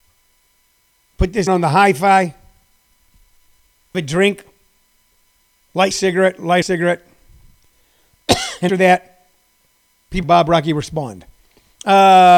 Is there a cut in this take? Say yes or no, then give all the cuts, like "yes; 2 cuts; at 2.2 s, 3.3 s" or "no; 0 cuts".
yes; 6 cuts; at 1.5 s, 3.9 s, 5.9 s, 6.6 s, 8.7 s, 10.2 s